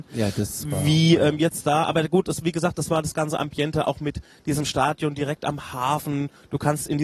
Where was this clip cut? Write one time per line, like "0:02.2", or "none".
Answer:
none